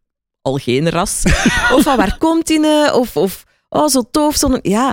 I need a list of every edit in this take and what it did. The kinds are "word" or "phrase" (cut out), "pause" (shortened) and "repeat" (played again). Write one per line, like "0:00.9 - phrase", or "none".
none